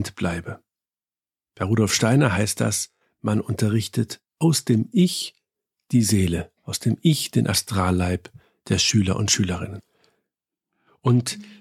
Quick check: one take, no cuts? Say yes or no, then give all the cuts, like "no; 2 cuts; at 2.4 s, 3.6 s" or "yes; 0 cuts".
yes; 0 cuts